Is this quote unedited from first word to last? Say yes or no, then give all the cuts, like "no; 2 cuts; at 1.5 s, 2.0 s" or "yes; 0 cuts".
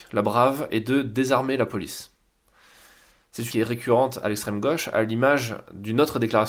no; 1 cut; at 3.5 s